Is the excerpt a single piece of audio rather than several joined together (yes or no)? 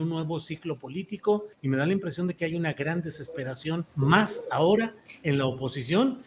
no